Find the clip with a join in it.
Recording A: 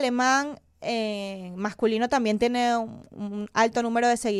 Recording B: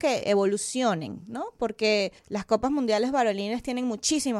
B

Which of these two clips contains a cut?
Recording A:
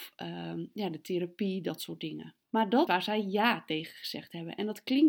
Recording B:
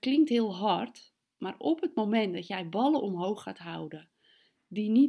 A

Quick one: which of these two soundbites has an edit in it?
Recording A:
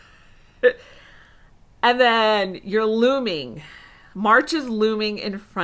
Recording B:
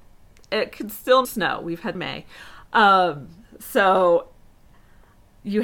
B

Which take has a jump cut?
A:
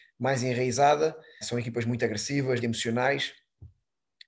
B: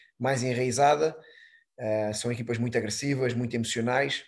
A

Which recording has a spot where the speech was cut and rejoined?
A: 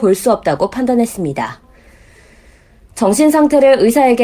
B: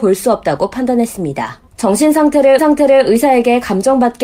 B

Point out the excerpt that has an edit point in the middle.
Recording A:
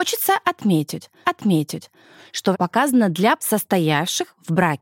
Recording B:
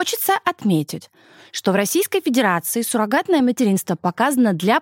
A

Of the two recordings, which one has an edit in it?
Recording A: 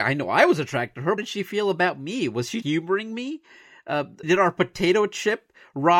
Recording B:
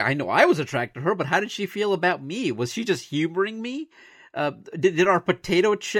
A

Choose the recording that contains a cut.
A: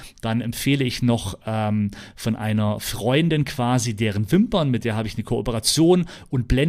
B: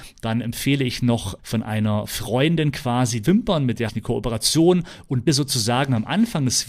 B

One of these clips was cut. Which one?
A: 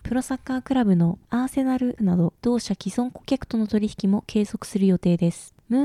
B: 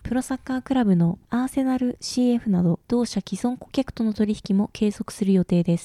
A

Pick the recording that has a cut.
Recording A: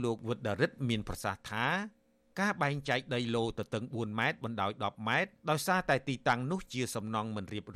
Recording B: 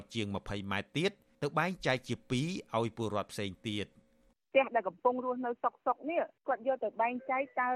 A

